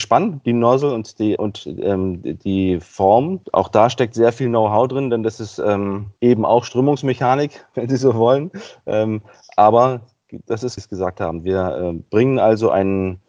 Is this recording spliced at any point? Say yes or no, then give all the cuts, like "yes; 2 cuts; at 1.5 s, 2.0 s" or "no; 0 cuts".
yes; 4 cuts; at 1.4 s, 3.4 s, 6.2 s, 10.8 s